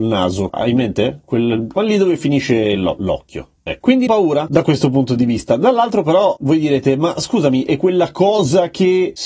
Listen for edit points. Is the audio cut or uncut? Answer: cut